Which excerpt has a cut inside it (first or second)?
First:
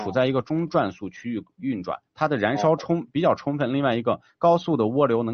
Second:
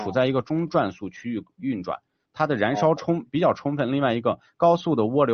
first